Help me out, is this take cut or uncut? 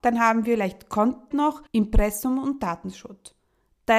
cut